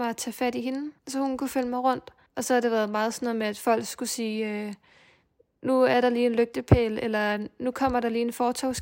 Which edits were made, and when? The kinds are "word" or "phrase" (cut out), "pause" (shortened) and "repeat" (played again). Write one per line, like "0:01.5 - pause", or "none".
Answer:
0:01.0 - pause
0:02.3 - pause